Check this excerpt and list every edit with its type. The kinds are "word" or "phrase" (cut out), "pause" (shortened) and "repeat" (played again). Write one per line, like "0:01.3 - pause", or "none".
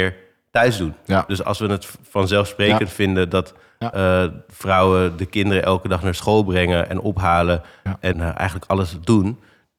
0:08.1 - word